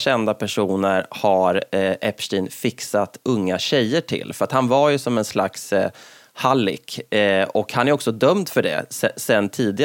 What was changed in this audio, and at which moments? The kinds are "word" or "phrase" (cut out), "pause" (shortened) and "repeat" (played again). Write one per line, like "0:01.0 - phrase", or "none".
none